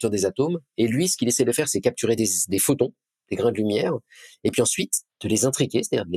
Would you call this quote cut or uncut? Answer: uncut